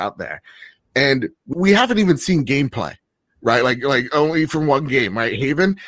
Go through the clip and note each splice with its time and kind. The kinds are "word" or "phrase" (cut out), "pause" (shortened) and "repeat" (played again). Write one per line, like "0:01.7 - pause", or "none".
0:01.5 - phrase